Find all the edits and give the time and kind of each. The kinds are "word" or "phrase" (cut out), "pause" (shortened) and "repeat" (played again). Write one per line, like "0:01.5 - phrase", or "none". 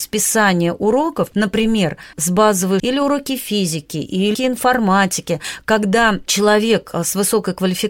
0:02.1 - word
0:02.8 - word
0:04.3 - word